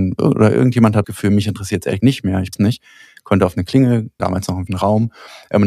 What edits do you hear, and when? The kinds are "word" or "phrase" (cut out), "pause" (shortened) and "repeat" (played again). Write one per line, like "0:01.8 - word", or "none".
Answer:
0:01.0 - word
0:02.0 - word
0:02.5 - word
0:04.2 - word
0:04.7 - word

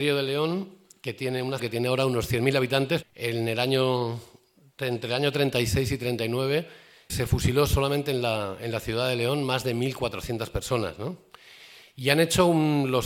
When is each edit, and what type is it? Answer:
0:01.6 - word
0:03.0 - word
0:07.1 - word

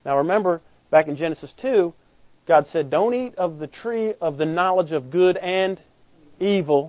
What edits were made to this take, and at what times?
none

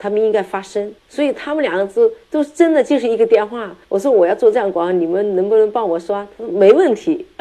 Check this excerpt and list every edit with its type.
0:01.0 - pause
0:02.2 - pause
0:03.8 - pause

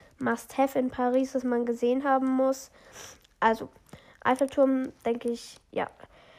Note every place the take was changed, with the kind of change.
none

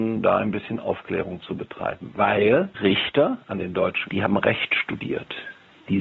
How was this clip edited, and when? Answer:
0:02.7 - word
0:03.4 - pause
0:04.1 - word

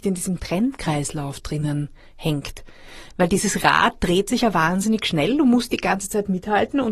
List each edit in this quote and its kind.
none

